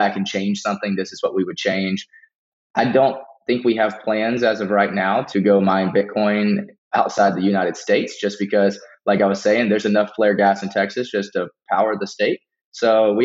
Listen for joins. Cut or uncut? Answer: uncut